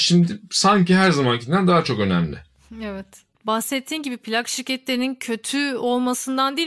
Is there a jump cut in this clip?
no; 0 cuts

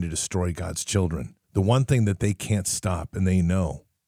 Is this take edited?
yes; 1 cut; at 1.4 s

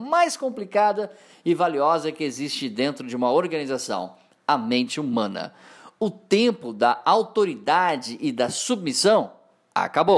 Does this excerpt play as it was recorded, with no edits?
yes; 0 cuts

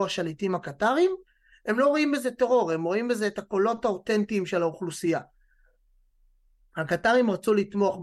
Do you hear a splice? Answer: no; 0 cuts

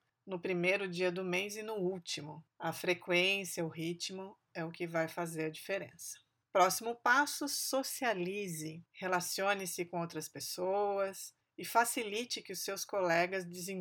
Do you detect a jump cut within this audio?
no; 0 cuts

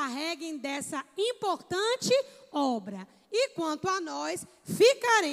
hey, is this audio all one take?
yes; 0 cuts

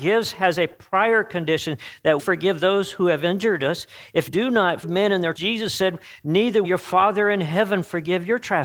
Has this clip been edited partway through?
yes; 5 cuts; at 2.2 s, 4.3 s, 4.8 s, 5.4 s, 6.6 s

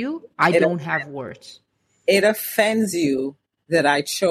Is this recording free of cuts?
yes; 0 cuts

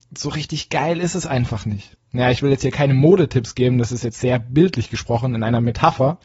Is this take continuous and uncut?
no; 1 cut; at 2.0 s

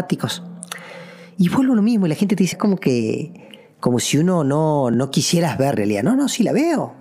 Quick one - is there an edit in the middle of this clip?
yes; 2 cuts; at 2.5 s, 5.7 s

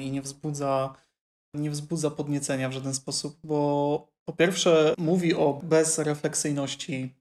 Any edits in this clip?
no; 0 cuts

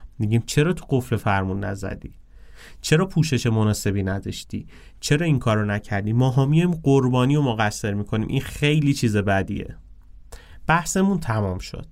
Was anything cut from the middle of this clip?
no; 0 cuts

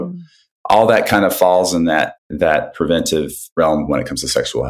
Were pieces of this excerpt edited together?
yes; 1 cut; at 2.2 s

